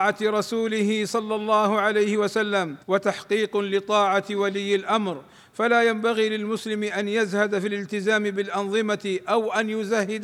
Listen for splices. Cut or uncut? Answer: cut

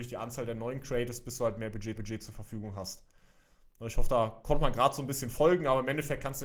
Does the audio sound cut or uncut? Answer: cut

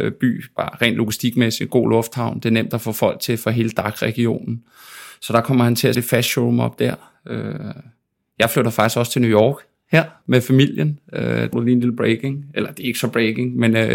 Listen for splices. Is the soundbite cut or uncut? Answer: cut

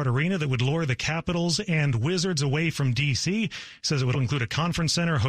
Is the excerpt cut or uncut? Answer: cut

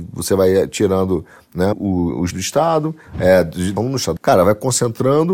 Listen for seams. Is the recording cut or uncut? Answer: cut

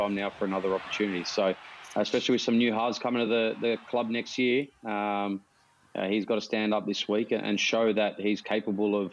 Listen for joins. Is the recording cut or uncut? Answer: uncut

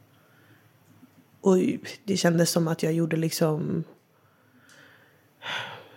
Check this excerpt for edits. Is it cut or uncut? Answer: uncut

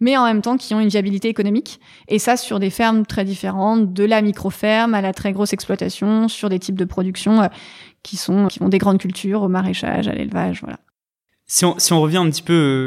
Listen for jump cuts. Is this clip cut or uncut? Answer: cut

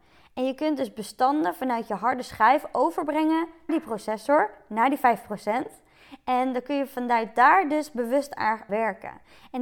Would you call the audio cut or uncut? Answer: cut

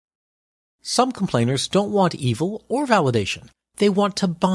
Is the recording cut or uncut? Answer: uncut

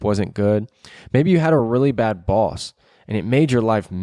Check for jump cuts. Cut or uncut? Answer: uncut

